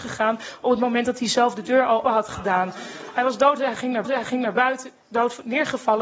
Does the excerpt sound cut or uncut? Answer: cut